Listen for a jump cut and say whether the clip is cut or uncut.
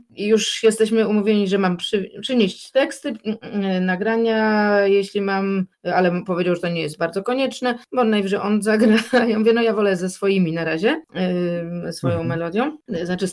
uncut